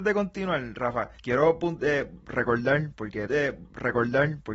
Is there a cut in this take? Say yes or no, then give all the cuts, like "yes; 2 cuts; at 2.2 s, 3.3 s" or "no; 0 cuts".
yes; 2 cuts; at 1.2 s, 3.3 s